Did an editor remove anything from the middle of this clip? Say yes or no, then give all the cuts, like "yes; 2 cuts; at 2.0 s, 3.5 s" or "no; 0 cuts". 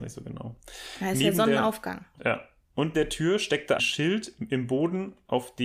yes; 3 cuts; at 2.2 s, 2.9 s, 3.8 s